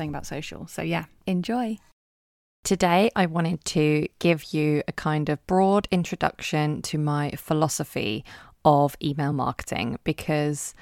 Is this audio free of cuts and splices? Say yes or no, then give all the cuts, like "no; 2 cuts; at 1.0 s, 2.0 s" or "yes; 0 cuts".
yes; 0 cuts